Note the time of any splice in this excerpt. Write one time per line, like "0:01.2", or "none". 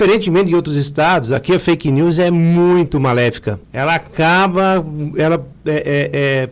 0:03.6